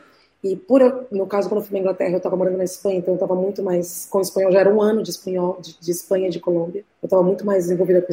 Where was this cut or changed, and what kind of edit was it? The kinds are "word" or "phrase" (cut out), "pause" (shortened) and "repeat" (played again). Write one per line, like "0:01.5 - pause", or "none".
0:06.9 - pause